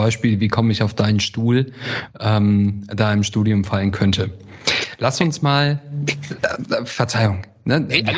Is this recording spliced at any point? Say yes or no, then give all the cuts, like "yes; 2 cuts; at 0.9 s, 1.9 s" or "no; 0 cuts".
no; 0 cuts